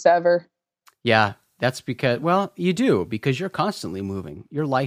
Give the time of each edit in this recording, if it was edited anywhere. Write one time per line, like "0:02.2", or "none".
none